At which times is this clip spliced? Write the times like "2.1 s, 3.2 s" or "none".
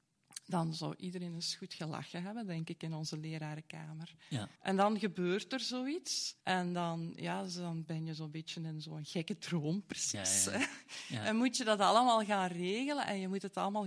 4.6 s, 6.4 s